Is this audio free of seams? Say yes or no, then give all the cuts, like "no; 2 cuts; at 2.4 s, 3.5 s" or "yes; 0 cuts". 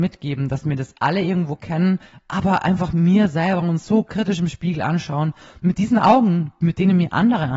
yes; 0 cuts